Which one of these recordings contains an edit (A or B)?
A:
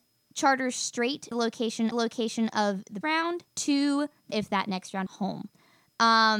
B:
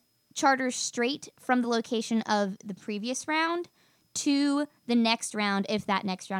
A